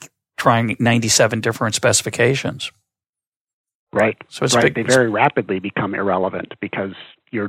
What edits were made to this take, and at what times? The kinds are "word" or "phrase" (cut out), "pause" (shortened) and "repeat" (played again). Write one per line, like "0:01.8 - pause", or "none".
none